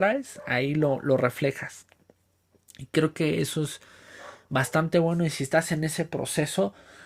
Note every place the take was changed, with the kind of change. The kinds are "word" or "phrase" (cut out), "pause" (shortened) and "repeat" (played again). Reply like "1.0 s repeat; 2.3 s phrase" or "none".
none